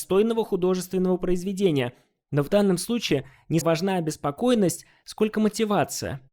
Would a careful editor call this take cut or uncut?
cut